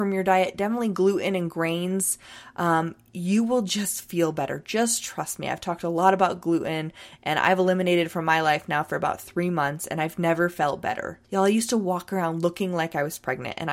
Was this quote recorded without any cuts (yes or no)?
no